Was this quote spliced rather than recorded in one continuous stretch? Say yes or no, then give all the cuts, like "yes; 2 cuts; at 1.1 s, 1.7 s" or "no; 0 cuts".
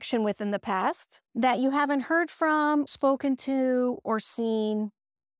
yes; 2 cuts; at 1.3 s, 2.9 s